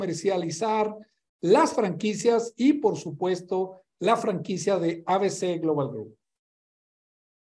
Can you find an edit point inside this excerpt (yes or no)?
no